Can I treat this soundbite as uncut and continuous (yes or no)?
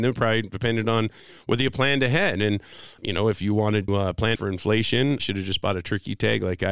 no